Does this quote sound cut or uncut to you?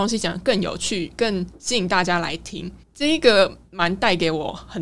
cut